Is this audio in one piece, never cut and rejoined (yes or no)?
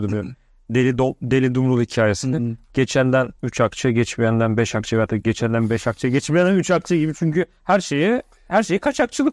no